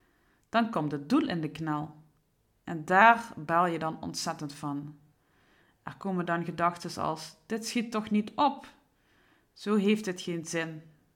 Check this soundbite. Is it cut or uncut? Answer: uncut